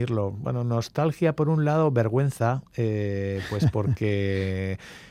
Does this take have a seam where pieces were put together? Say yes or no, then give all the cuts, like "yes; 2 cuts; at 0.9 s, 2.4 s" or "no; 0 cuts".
no; 0 cuts